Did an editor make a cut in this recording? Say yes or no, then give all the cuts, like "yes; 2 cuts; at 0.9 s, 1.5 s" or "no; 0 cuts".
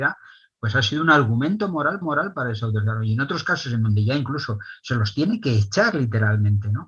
yes; 1 cut; at 2.0 s